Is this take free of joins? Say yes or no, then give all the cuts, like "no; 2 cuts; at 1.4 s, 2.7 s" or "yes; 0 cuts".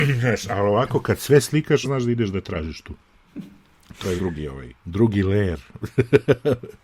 no; 3 cuts; at 1.8 s, 4.2 s, 4.8 s